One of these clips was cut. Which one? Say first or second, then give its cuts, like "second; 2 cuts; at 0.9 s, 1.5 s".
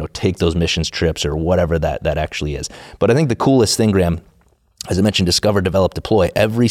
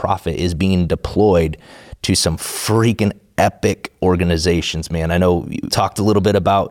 second; 1 cut; at 5.7 s